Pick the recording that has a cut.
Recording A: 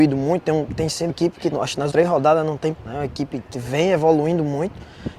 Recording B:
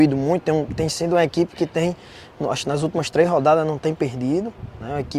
A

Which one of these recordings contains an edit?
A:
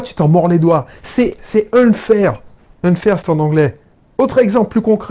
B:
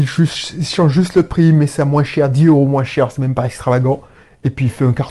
A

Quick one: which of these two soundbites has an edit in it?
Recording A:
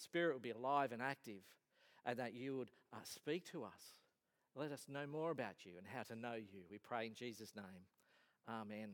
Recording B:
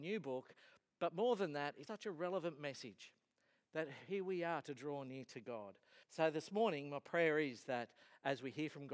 B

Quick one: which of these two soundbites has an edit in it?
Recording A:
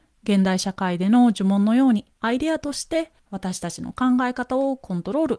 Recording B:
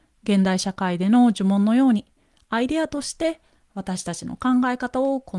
A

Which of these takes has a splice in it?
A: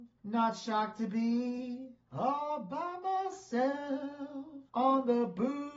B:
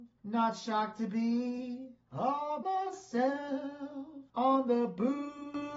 B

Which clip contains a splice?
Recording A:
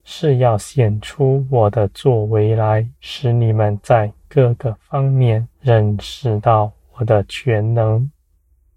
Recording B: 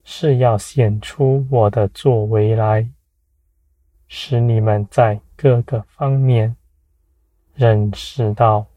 A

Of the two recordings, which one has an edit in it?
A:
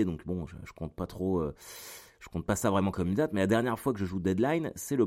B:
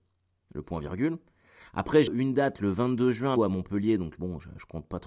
B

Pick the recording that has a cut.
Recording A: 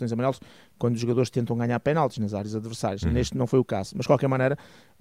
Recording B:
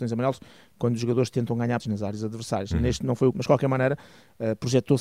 B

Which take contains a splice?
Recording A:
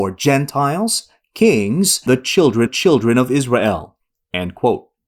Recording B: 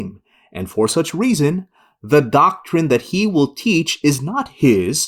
A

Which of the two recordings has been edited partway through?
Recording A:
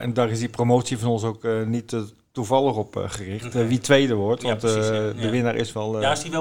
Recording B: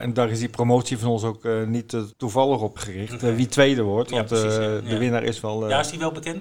B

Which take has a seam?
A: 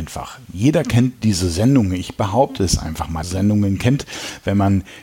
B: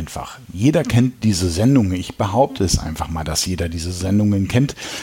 A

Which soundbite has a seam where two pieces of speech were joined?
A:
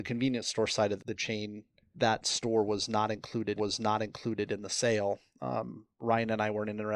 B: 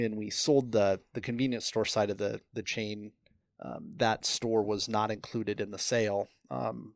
A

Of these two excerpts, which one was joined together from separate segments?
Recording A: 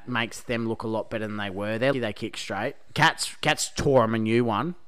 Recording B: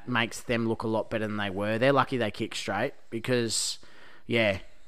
A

